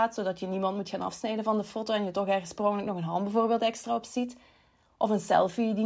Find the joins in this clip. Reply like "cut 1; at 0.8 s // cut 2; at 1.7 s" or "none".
none